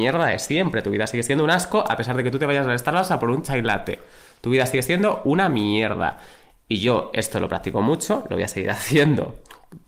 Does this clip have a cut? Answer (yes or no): no